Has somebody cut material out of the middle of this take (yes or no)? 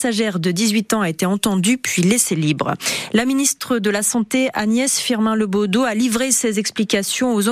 no